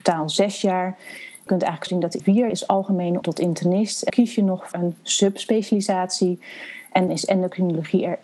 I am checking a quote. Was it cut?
yes; 8 cuts; at 1.5 s, 1.9 s, 2.2 s, 2.5 s, 3.2 s, 4.1 s, 4.7 s, 7.1 s

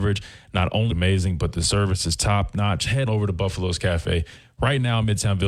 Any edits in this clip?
yes; 2 cuts; at 0.9 s, 3.1 s

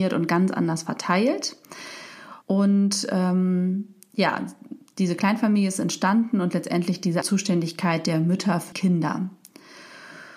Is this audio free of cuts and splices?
no; 3 cuts; at 2.4 s, 7.2 s, 8.7 s

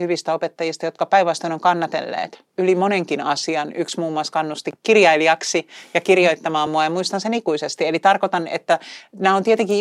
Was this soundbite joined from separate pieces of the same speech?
no; 0 cuts

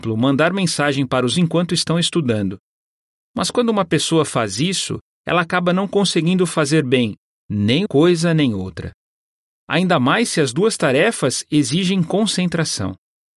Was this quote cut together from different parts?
yes; 2 cuts; at 1.3 s, 7.9 s

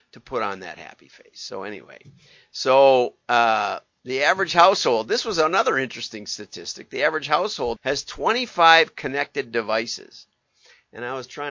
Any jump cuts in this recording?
yes; 1 cut; at 7.8 s

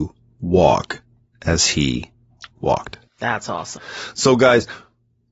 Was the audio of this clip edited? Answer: yes; 2 cuts; at 1.3 s, 3.1 s

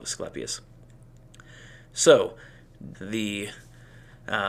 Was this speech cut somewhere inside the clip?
yes; 1 cut; at 2.9 s

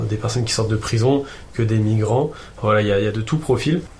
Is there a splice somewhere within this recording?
no; 0 cuts

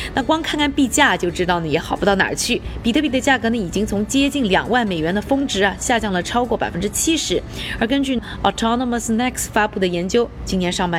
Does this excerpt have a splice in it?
no; 0 cuts

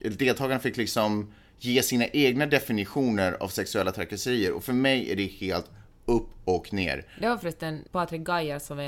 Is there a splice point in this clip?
yes; 1 cut; at 7.9 s

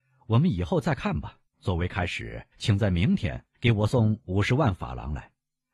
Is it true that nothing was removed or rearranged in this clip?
no; 3 cuts; at 1.5 s, 2.5 s, 3.5 s

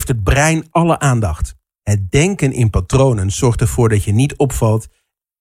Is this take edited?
no; 0 cuts

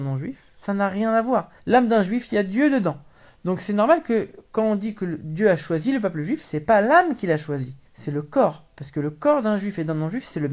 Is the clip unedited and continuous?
no; 2 cuts; at 1.6 s, 7.9 s

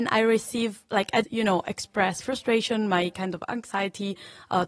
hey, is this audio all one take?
no; 2 cuts; at 1.2 s, 2.2 s

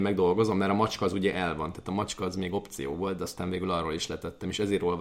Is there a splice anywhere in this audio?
no; 0 cuts

